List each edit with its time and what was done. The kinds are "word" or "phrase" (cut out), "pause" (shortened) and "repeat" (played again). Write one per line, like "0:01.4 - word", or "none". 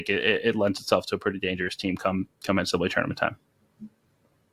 none